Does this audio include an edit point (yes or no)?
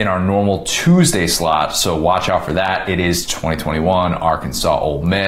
no